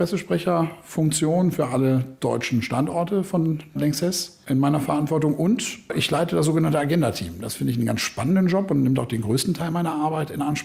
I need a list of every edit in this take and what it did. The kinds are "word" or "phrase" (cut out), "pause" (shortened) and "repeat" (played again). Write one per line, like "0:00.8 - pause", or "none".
0:03.8 - word

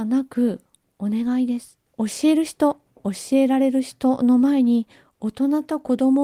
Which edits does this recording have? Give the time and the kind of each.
0:01.9 - pause

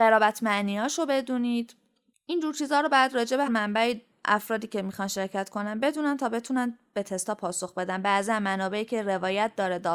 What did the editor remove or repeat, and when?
0:03.5 - word

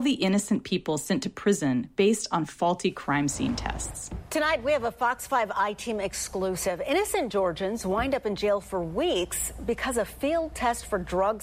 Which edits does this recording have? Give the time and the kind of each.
none

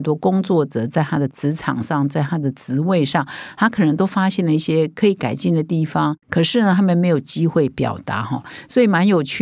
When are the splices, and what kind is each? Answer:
0:06.2 - pause

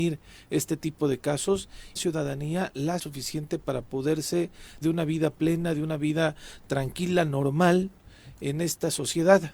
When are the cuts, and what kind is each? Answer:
0:02.0 - phrase
0:03.0 - word
0:04.8 - word

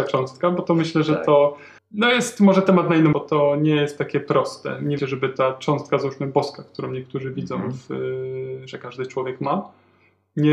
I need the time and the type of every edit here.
0:01.8 - pause
0:03.1 - word
0:05.0 - phrase

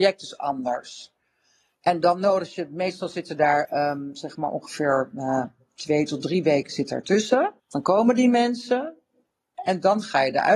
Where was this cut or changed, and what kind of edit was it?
0:07.6 - pause

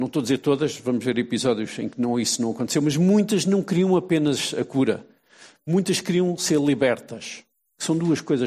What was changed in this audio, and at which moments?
none

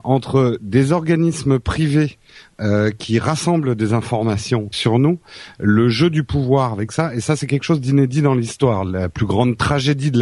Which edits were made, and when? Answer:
0:04.7 - word

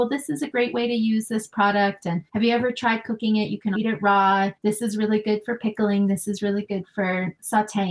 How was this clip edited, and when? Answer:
0:02.3 - pause
0:03.7 - word
0:04.6 - pause

